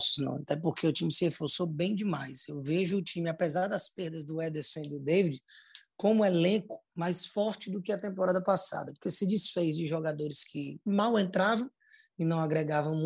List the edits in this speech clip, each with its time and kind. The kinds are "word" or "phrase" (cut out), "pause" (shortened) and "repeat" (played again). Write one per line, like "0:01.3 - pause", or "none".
none